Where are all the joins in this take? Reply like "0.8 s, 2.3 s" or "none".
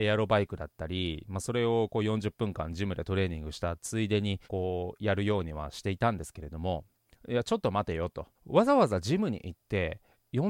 4.4 s, 7.0 s, 8.4 s

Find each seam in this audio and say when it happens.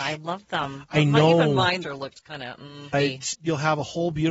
1.8 s, 2.9 s, 3.3 s

